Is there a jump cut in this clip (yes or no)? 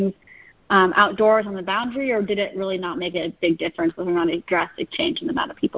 no